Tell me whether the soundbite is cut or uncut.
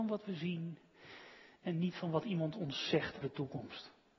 cut